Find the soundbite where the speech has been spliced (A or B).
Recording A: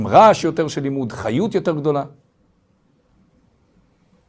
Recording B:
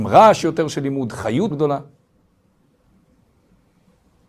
B